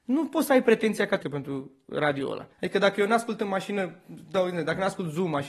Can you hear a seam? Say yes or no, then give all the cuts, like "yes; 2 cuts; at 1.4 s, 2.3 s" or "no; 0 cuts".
yes; 2 cuts; at 1.2 s, 2.5 s